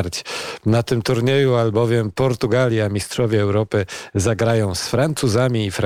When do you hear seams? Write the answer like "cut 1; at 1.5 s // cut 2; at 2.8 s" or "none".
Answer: none